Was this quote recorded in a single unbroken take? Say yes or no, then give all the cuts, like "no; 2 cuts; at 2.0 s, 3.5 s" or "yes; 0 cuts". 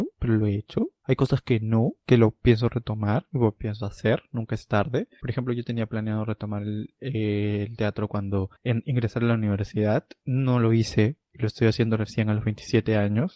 yes; 0 cuts